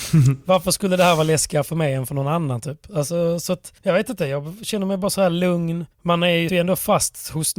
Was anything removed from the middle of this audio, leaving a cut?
yes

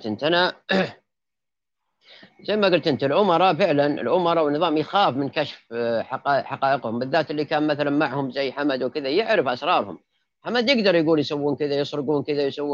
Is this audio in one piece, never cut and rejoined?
yes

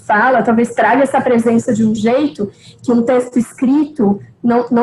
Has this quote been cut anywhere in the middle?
no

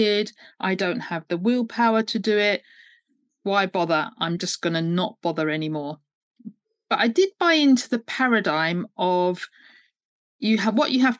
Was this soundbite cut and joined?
no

